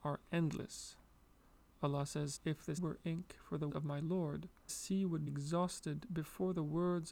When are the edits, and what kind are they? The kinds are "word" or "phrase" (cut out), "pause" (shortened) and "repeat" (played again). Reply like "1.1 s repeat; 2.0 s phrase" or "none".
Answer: 2.4 s word; 2.8 s word; 3.7 s word; 4.7 s word; 5.3 s word